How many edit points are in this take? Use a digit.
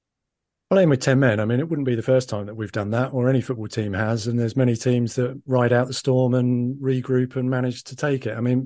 0